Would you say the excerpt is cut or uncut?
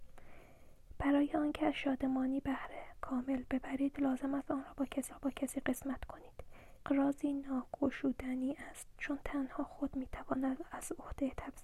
cut